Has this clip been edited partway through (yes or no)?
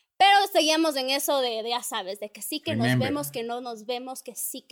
no